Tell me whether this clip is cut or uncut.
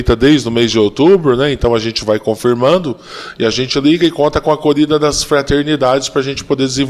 uncut